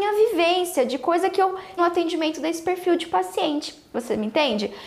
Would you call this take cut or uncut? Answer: cut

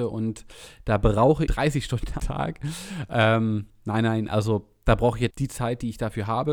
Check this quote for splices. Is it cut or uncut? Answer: cut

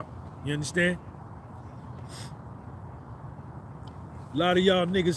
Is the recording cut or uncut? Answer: uncut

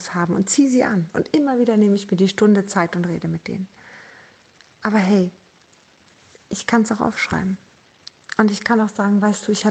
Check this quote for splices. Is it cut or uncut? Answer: uncut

